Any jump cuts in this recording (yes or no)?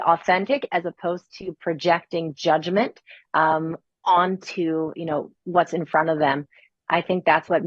no